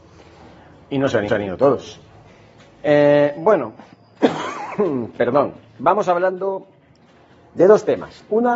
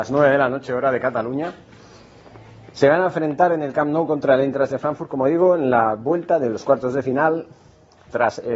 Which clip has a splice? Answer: first; 2 cuts; at 1.3 s, 2.3 s

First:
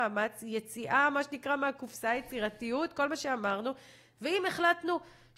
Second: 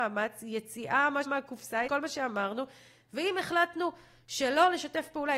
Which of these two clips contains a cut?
second; 2 cuts; at 1.3 s, 1.9 s

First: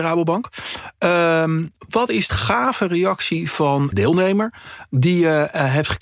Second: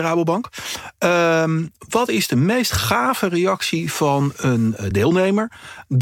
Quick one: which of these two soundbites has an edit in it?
first; 2 cuts; at 2.3 s, 3.9 s

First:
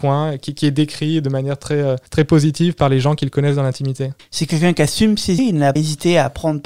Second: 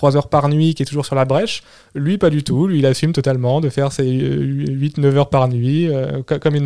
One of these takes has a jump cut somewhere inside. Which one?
first; 4 cuts; at 2.1 s, 4.2 s, 5.4 s, 5.8 s

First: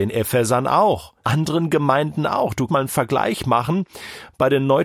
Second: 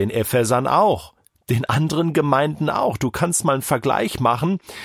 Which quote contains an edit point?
first; 2 cuts; at 1.2 s, 2.7 s

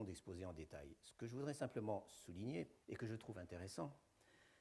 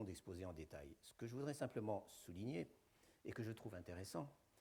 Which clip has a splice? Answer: first; 1 cut; at 2.8 s

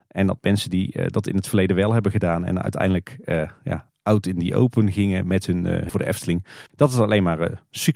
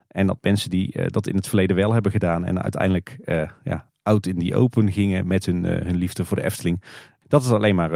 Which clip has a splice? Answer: first; 2 cuts; at 5.9 s, 6.7 s

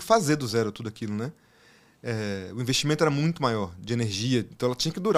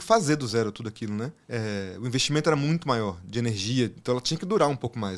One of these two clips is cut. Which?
second; 1 cut; at 1.4 s

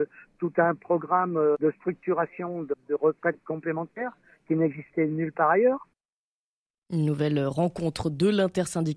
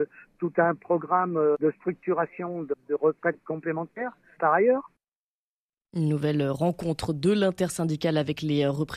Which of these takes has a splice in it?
second; 1 cut; at 4.4 s

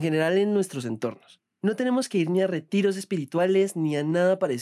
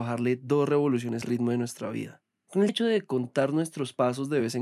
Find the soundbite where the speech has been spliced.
second; 2 cuts; at 1.2 s, 2.7 s

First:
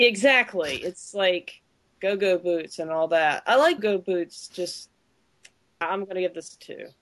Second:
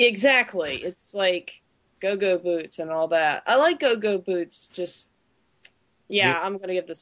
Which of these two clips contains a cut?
first; 2 cuts; at 3.8 s, 5.8 s

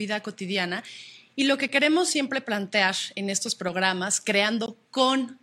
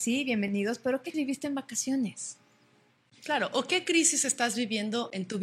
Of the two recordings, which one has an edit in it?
second; 1 cut; at 1.1 s

